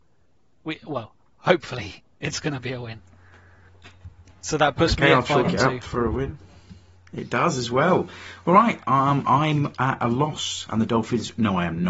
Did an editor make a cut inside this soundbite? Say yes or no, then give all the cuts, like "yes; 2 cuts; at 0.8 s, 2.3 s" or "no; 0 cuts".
no; 0 cuts